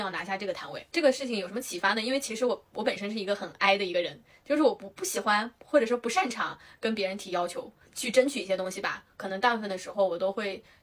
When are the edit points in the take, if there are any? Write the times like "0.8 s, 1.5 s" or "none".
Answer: none